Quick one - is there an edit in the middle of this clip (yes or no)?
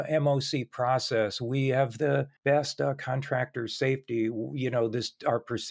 yes